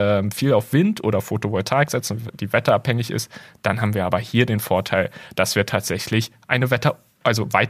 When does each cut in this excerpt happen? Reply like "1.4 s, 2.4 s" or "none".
none